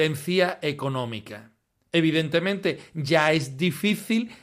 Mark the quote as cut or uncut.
cut